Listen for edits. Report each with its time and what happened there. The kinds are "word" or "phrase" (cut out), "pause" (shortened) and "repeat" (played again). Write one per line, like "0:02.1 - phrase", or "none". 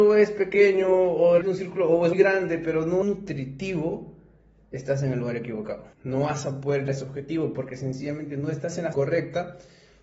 0:01.4 - word
0:02.1 - word
0:03.0 - phrase
0:05.9 - pause
0:06.9 - word
0:08.9 - word